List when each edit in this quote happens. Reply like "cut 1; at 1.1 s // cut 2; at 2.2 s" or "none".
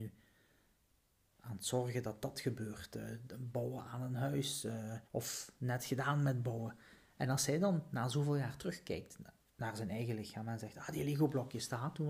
cut 1; at 5.1 s

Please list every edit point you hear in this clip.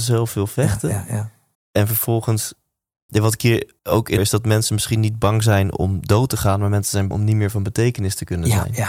cut 1; at 1.5 s // cut 2; at 3.1 s // cut 3; at 3.8 s // cut 4; at 4.2 s // cut 5; at 7.1 s

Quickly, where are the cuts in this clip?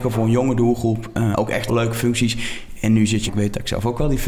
cut 1; at 1.3 s // cut 2; at 1.7 s // cut 3; at 3.3 s

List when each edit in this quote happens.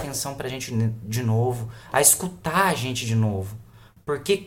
none

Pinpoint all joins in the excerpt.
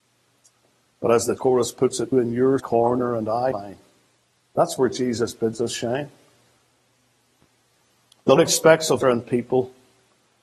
cut 1; at 1.4 s // cut 2; at 2.1 s // cut 3; at 2.6 s // cut 4; at 3.5 s // cut 5; at 8.4 s // cut 6; at 9.0 s

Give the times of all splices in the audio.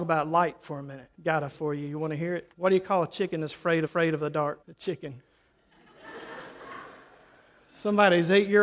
cut 1; at 1.1 s // cut 2; at 1.5 s // cut 3; at 2.5 s // cut 4; at 3.9 s // cut 5; at 4.6 s

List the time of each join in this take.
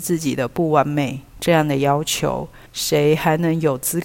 cut 1; at 1.3 s // cut 2; at 2.7 s

